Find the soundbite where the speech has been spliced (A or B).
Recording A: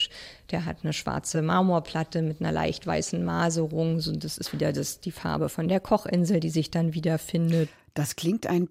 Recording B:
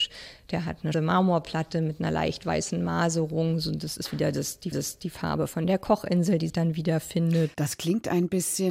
B